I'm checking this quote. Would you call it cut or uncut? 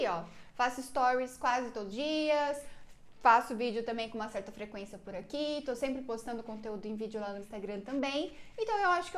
cut